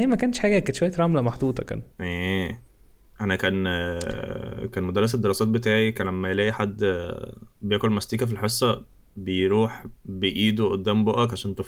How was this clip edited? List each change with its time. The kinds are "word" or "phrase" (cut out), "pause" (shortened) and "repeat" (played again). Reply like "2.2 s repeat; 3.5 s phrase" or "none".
1.9 s pause; 7.5 s pause; 10.0 s pause